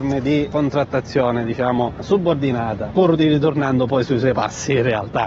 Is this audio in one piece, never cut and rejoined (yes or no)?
yes